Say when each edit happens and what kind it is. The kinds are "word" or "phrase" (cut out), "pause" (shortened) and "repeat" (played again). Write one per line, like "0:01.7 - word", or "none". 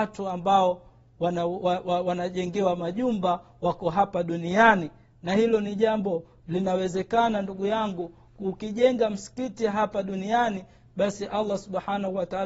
none